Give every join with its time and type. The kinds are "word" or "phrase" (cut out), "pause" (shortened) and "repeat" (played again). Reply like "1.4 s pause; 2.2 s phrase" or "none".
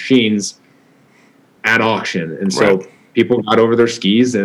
none